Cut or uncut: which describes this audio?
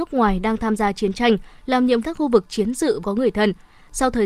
cut